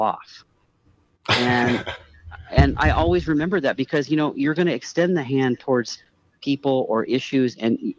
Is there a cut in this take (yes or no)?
no